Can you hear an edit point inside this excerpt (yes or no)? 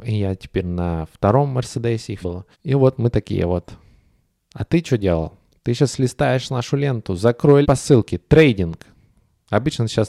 yes